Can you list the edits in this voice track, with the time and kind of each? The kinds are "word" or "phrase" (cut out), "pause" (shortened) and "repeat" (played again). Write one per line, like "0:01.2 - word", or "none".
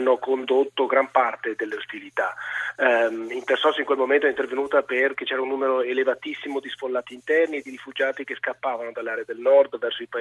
0:01.6 - word